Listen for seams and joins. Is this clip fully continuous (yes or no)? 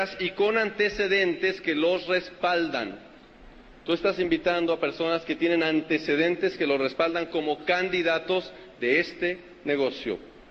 yes